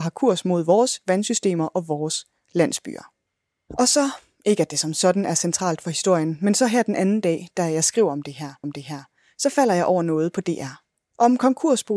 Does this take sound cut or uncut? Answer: cut